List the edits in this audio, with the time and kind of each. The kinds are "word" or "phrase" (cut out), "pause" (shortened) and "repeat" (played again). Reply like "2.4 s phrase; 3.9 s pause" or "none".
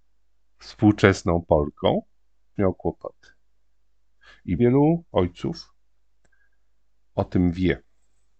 2.6 s word; 4.6 s word; 5.1 s pause